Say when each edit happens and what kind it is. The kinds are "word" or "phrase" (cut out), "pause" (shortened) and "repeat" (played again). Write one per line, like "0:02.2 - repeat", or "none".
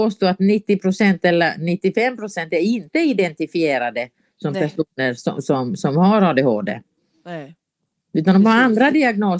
none